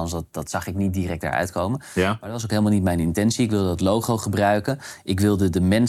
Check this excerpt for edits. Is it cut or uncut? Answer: uncut